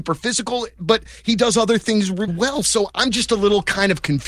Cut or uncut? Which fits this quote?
cut